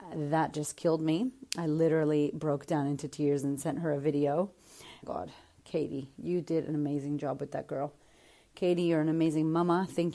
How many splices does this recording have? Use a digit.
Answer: 1